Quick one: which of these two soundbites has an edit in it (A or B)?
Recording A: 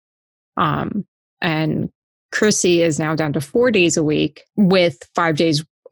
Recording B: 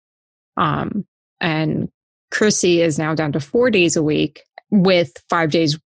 A